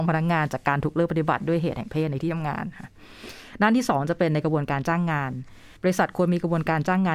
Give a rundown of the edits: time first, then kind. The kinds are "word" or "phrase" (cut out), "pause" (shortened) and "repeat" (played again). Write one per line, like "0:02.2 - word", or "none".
0:05.8 - pause